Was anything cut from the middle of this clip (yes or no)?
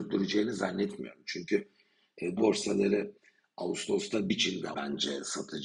yes